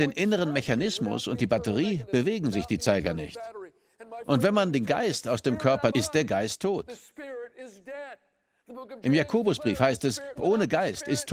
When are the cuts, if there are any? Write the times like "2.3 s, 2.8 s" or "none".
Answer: 5.9 s, 10.4 s